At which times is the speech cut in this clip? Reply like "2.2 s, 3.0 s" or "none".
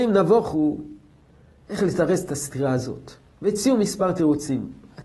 none